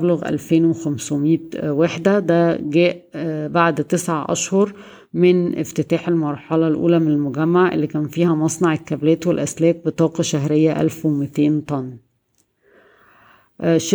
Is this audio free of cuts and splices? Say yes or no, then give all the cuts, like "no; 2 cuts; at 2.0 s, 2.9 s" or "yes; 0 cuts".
yes; 0 cuts